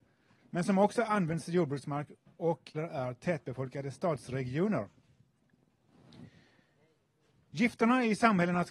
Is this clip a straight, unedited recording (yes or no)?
no